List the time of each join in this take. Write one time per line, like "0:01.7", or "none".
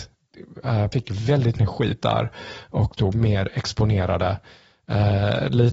0:00.9
0:01.6
0:02.0
0:03.1